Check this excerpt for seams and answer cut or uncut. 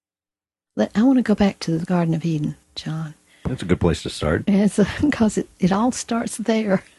cut